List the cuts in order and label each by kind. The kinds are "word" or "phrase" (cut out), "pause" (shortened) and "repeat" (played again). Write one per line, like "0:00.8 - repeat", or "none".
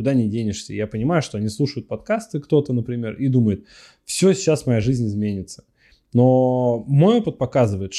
none